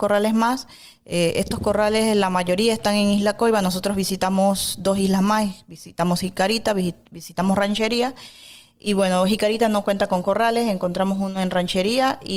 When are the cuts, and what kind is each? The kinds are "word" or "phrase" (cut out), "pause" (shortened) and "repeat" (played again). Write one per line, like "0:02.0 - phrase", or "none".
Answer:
none